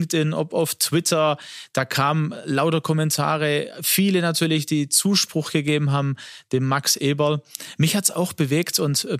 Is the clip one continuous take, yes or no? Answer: yes